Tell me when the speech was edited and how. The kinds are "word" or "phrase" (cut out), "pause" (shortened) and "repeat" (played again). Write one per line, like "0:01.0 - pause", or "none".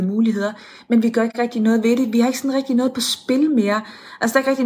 none